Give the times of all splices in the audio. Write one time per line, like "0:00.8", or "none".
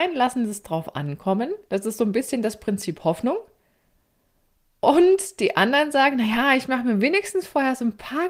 0:01.6

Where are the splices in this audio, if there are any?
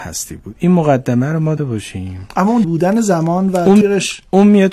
0:01.6
0:02.6
0:03.8

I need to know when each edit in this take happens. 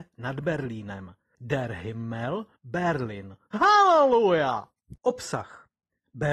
0:01.3
0:02.6

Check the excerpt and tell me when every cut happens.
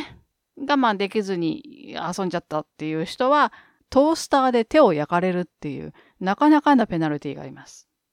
none

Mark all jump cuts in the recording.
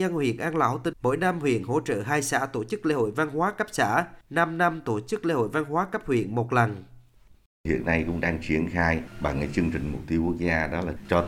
0:00.9
0:04.2

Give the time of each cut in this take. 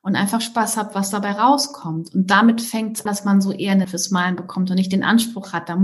0:03.1
0:03.8

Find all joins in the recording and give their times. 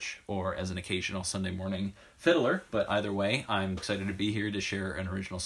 0:03.8

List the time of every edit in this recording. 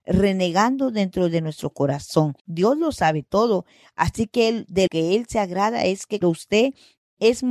0:02.4
0:04.9
0:06.2

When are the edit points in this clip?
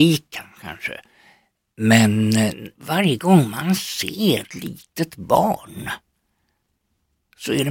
0:02.7
0:04.5

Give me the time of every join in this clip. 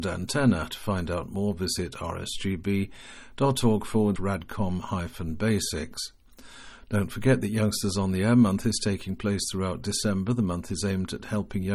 0:04.2

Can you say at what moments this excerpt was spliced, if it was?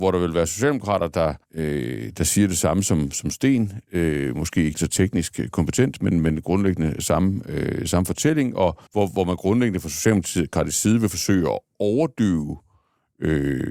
0:01.4
0:04.7
0:08.9

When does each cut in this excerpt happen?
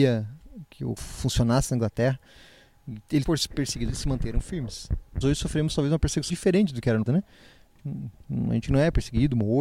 0:01.0
0:03.2
0:03.9
0:05.2
0:06.3
0:07.1

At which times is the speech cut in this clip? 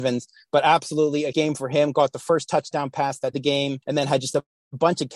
0:01.3
0:03.3
0:03.8

